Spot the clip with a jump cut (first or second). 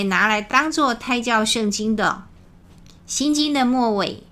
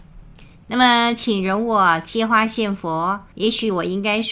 second